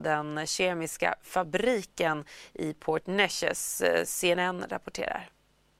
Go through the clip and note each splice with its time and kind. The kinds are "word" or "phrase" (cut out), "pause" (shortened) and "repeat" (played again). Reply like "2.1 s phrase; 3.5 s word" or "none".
none